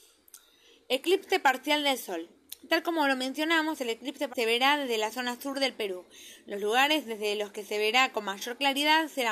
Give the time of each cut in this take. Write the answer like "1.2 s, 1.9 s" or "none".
4.3 s